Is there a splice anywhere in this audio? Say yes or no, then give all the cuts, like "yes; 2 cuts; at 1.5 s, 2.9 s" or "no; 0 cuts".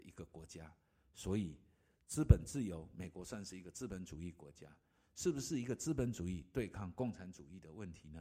no; 0 cuts